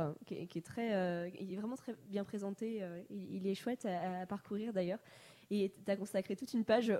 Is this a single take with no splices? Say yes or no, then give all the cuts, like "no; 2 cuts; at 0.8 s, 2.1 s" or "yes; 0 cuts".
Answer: yes; 0 cuts